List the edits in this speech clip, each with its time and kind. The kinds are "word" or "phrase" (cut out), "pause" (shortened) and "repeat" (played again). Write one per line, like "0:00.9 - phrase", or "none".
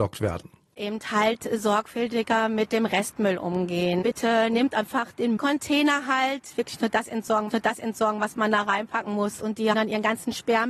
0:05.4 - phrase
0:07.5 - repeat
0:09.7 - word